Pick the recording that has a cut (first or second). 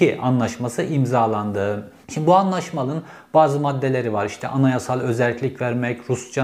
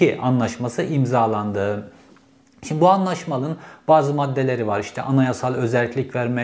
first